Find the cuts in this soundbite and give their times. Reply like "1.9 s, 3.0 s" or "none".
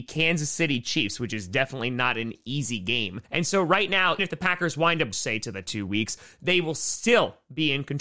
3.2 s, 4.2 s, 5.1 s, 5.7 s